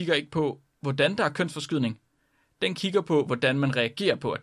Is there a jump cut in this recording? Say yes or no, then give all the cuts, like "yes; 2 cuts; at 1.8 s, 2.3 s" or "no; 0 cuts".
no; 0 cuts